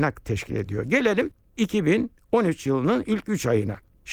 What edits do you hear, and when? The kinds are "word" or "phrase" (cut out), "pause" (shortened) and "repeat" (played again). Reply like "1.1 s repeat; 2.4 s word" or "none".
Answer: none